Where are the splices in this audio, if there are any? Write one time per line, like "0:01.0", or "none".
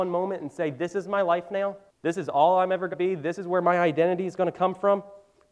0:01.9
0:02.9